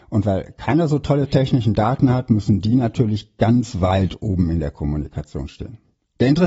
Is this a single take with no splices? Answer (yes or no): yes